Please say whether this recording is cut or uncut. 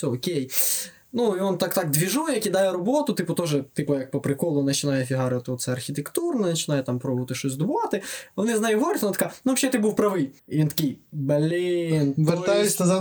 cut